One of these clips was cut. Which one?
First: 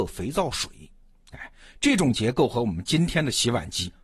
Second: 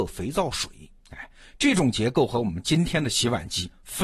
second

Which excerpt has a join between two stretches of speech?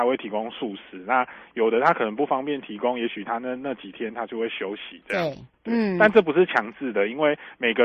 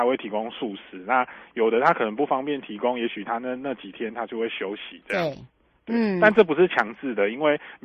first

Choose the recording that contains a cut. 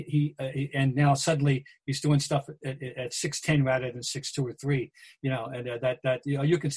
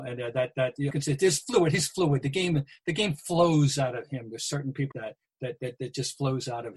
second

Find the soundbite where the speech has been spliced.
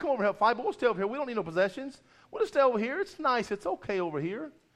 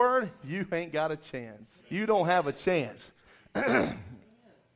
second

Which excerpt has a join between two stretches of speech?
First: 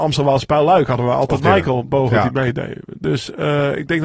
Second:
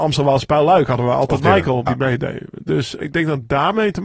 second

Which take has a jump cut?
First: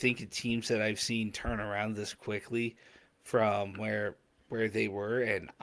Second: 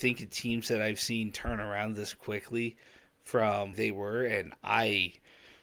second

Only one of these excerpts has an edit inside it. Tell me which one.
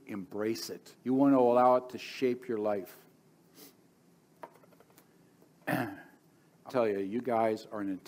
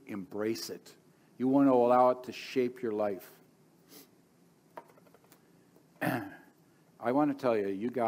first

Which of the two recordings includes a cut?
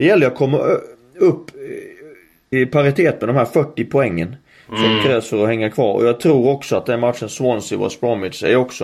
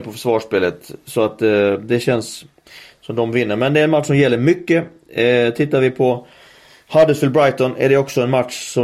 first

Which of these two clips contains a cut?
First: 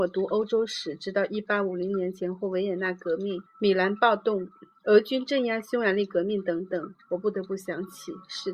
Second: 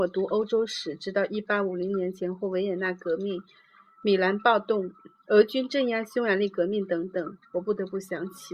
first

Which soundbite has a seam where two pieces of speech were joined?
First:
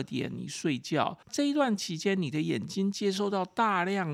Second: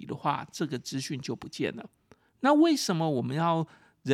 first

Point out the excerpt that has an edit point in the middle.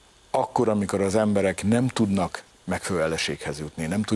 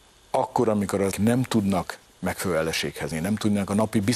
second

